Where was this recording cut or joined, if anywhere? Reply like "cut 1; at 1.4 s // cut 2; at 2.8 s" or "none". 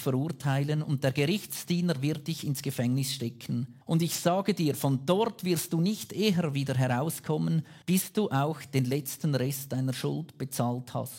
cut 1; at 3.8 s // cut 2; at 7.8 s